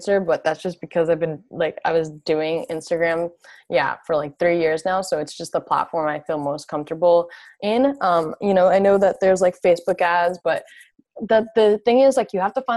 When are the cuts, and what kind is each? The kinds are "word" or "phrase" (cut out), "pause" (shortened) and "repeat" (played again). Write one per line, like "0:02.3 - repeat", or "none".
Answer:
none